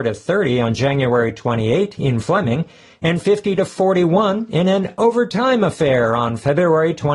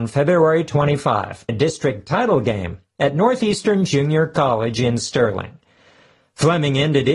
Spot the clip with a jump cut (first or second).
second